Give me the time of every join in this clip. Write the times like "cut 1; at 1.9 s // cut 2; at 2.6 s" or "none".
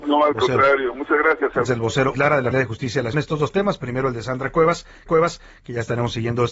cut 1; at 1.7 s // cut 2; at 2.1 s // cut 3; at 2.5 s // cut 4; at 3.1 s // cut 5; at 5.1 s